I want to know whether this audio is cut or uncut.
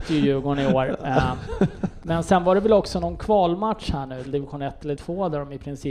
cut